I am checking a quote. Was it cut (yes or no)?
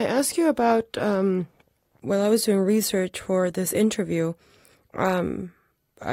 no